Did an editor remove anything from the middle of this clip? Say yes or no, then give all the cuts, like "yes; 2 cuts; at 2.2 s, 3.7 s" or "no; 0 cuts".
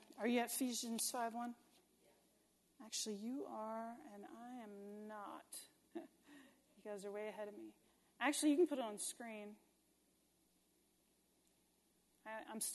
no; 0 cuts